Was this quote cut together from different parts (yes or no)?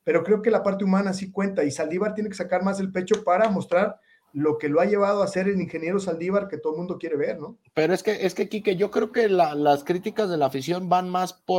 no